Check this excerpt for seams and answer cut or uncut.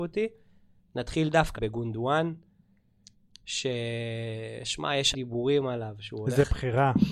cut